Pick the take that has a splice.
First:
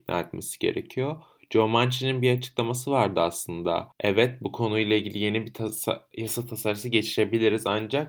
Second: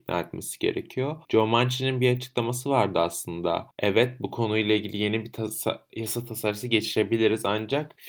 second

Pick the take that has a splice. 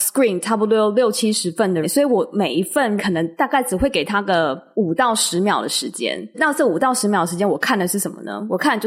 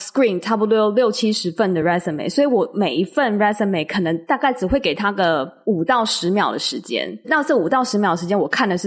first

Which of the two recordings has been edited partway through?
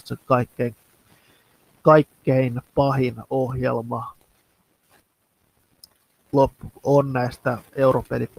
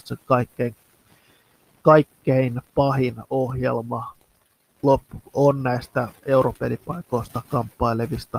second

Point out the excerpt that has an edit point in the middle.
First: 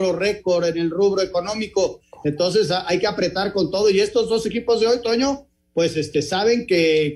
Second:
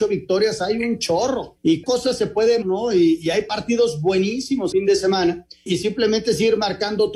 second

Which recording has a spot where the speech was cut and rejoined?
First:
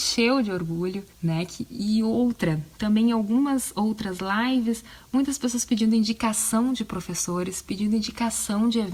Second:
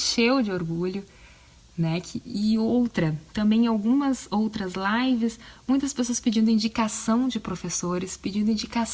first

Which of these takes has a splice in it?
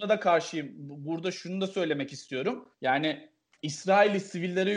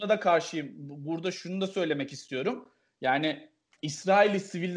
first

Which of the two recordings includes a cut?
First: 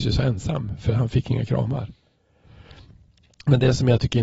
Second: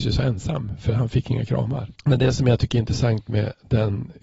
second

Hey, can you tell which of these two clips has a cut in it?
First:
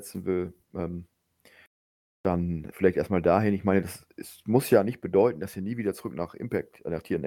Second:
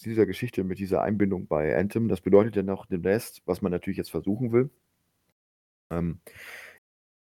first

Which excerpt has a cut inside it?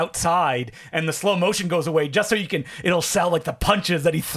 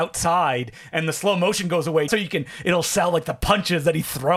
second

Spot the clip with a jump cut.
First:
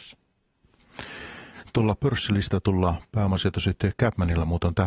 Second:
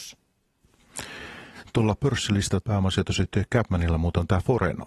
second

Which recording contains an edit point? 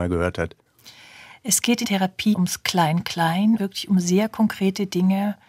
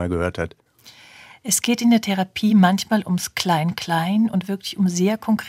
first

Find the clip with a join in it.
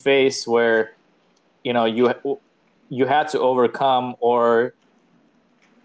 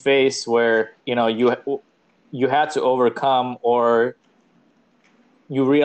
second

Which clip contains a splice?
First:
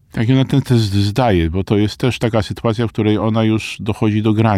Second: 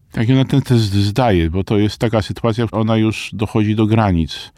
second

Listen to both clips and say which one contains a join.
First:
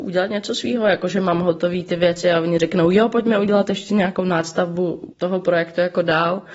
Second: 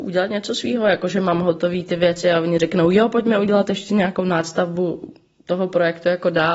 first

